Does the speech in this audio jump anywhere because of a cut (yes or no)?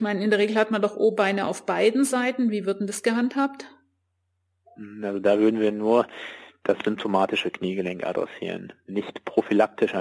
no